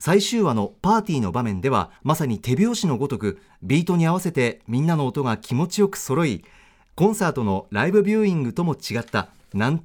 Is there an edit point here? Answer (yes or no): yes